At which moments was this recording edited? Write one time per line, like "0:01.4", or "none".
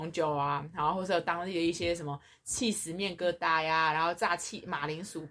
none